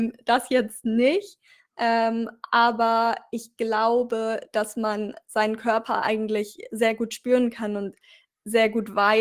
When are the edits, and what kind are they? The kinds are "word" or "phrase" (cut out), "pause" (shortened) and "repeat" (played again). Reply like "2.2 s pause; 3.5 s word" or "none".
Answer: none